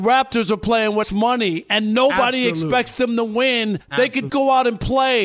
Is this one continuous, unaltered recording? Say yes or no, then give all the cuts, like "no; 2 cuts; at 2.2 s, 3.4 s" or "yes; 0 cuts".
no; 3 cuts; at 1.0 s, 3.8 s, 4.3 s